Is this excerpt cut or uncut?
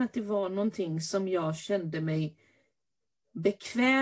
uncut